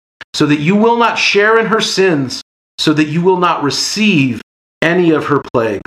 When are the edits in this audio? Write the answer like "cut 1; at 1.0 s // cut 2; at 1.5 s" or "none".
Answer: none